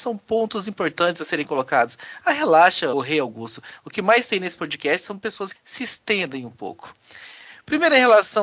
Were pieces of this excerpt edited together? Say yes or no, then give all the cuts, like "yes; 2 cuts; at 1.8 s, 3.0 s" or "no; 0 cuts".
yes; 2 cuts; at 2.9 s, 5.5 s